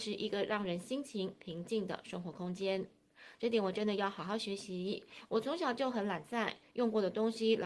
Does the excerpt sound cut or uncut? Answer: uncut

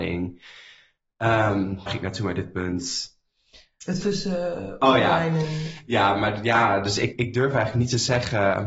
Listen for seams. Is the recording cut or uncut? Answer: cut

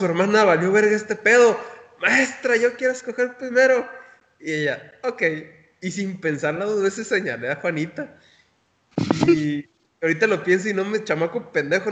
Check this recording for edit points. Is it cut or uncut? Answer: uncut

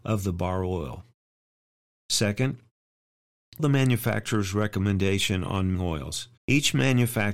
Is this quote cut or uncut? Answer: cut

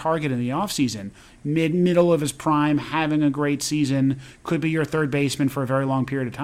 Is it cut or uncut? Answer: uncut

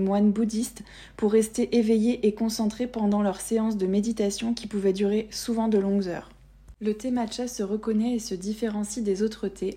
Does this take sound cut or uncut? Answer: uncut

